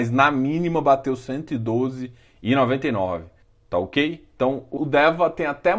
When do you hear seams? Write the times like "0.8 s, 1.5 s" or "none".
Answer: 3.4 s, 4.8 s